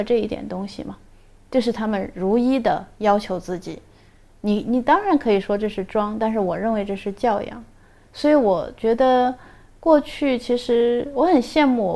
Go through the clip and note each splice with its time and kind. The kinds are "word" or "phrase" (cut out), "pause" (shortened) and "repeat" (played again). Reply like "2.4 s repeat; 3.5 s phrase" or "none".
none

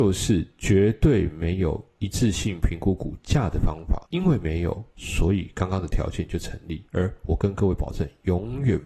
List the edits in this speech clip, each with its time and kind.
4.1 s pause

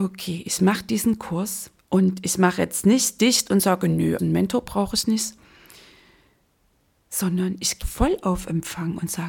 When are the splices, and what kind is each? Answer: 1.8 s pause; 4.2 s word; 7.8 s word

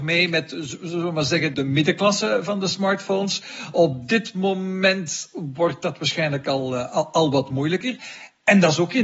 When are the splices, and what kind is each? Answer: none

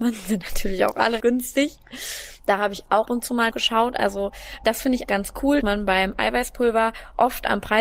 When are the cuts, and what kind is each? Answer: 1.2 s word; 3.0 s word; 3.5 s word; 4.6 s word; 5.0 s word; 5.6 s word

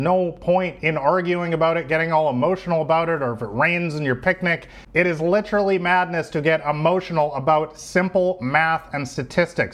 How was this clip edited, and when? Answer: none

